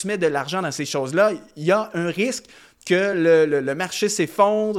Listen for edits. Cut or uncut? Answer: uncut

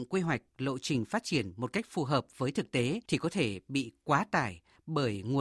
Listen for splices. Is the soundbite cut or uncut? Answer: cut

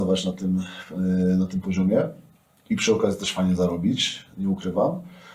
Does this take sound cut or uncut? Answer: uncut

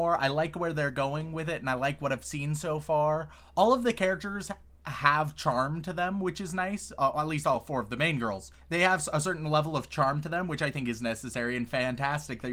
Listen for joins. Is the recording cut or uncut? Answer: uncut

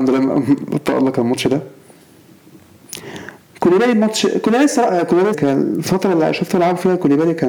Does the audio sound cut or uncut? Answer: cut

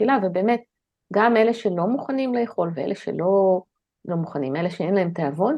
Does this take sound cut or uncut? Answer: cut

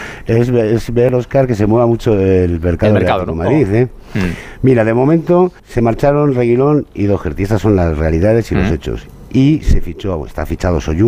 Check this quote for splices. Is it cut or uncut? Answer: cut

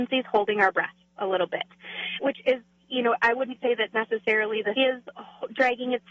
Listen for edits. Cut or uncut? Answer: cut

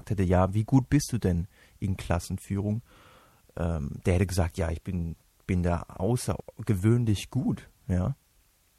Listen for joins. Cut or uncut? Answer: uncut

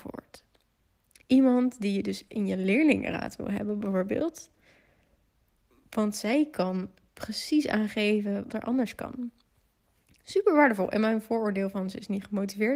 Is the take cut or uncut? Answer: cut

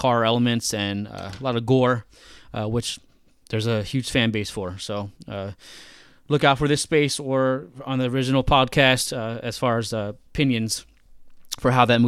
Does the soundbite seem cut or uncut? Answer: uncut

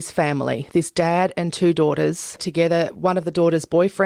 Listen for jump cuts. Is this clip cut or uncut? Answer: cut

